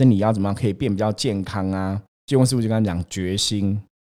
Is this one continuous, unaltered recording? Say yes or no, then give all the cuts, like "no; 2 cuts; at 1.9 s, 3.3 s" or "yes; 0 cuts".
no; 1 cut; at 2.1 s